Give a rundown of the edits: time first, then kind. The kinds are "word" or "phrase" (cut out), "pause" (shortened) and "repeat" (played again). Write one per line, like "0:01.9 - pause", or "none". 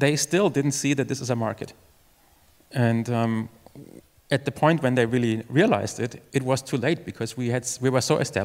none